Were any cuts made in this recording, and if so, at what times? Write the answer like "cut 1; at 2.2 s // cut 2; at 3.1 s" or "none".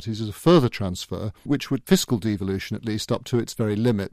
cut 1; at 1.5 s // cut 2; at 1.8 s